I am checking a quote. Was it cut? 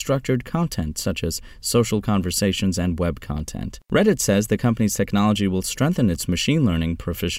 no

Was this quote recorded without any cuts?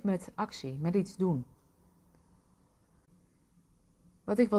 yes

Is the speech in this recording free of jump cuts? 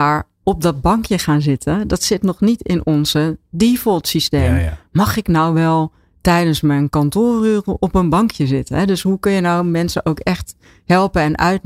yes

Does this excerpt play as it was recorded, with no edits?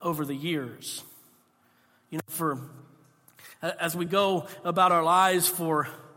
yes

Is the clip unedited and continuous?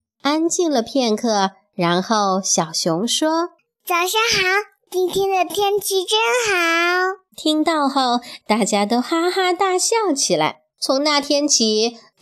no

